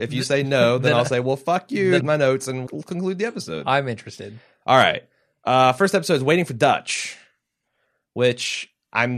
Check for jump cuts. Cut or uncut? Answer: cut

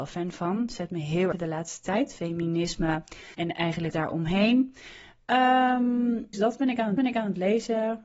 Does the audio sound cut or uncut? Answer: cut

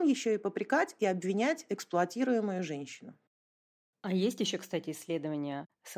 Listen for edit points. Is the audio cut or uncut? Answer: uncut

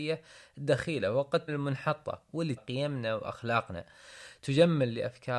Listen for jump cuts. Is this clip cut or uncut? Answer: cut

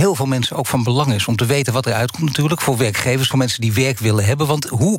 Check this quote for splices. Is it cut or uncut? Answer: cut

